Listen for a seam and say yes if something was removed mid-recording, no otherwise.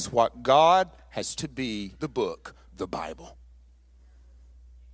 yes